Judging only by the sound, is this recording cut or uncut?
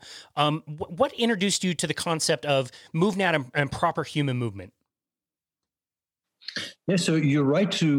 uncut